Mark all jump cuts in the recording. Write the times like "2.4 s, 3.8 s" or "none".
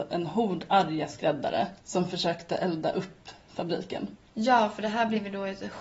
1.8 s, 4.3 s